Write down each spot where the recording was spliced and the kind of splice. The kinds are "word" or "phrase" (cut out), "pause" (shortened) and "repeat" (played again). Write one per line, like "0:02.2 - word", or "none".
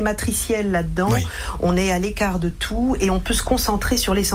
none